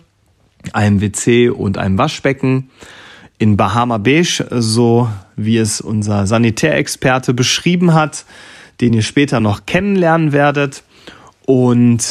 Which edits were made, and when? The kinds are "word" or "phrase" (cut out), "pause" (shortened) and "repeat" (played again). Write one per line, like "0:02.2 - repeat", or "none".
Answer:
none